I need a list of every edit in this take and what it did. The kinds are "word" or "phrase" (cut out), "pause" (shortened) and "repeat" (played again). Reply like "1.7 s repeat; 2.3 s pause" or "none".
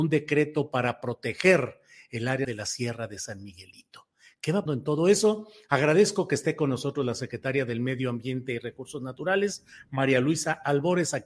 2.4 s word; 4.7 s word